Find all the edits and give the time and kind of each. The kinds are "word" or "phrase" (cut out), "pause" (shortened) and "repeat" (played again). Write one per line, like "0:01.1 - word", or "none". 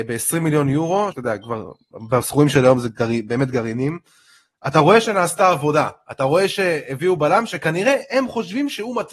0:01.1 - word